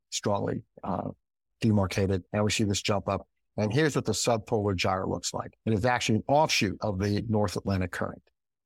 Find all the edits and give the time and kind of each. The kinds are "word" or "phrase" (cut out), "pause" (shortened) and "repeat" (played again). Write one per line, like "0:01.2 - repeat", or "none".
0:02.3 - pause
0:05.6 - pause